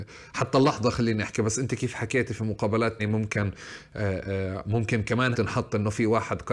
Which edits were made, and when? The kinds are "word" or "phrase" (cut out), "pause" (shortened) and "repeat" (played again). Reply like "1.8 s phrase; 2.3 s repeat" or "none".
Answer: 3.0 s word; 5.3 s word